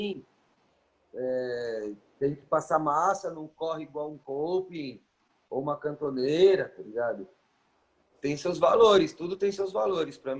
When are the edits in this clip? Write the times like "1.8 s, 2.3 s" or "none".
none